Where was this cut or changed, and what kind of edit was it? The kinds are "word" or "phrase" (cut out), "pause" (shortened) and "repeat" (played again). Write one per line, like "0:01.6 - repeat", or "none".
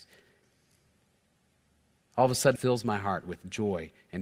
0:02.6 - word